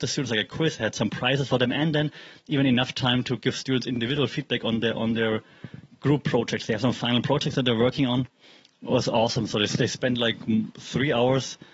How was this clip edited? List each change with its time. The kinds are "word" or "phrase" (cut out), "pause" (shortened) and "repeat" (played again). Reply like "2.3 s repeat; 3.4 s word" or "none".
none

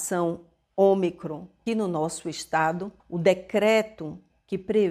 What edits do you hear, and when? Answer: 1.7 s word; 3.0 s pause

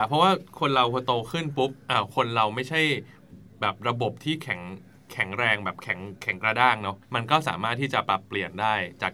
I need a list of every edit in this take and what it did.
7.0 s pause

